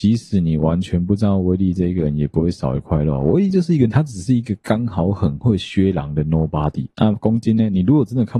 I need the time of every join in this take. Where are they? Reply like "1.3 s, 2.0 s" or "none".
3.9 s